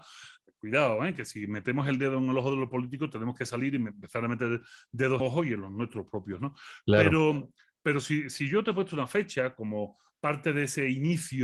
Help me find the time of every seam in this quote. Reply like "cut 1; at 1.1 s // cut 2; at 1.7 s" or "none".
cut 1; at 5.2 s